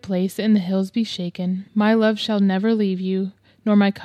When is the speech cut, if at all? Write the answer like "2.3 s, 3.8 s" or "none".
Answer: 1.7 s